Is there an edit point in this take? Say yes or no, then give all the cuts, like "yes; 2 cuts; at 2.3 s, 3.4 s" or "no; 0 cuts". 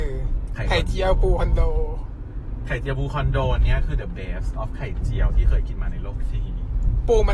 no; 0 cuts